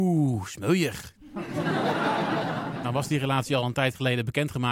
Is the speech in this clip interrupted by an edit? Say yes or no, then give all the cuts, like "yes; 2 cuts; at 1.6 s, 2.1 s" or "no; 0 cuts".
no; 0 cuts